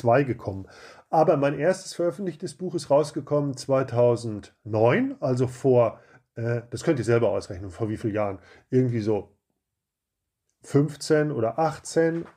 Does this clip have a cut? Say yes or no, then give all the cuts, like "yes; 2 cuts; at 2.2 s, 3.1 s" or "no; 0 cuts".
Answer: no; 0 cuts